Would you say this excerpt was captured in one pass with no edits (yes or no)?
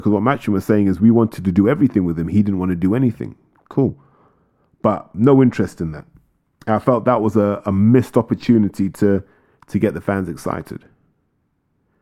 yes